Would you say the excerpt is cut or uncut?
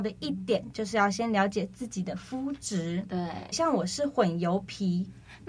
cut